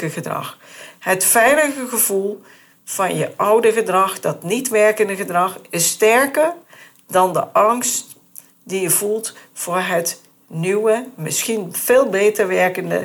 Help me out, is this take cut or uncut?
uncut